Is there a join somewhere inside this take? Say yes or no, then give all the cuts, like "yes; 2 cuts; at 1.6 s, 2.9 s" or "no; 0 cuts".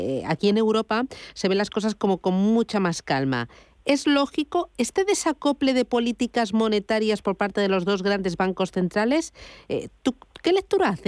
no; 0 cuts